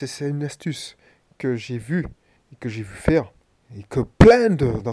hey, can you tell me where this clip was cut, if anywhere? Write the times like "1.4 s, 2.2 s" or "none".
none